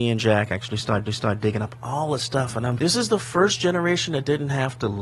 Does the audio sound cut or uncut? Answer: cut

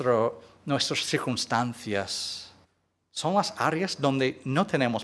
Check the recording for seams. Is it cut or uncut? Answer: cut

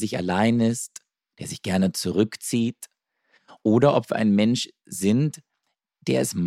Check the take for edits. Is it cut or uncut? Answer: uncut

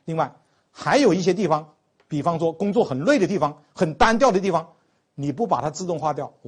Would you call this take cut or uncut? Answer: uncut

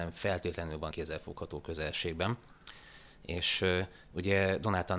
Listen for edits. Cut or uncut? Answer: cut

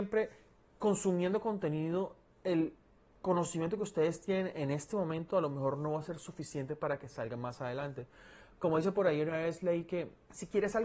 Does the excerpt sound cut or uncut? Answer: uncut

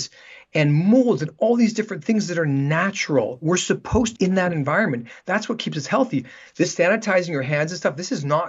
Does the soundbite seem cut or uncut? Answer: cut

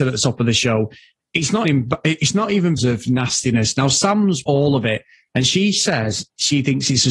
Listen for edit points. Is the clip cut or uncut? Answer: cut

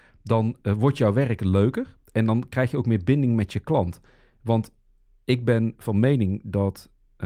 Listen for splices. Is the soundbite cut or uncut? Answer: uncut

